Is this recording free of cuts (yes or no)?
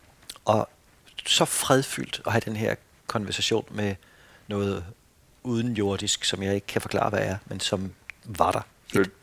yes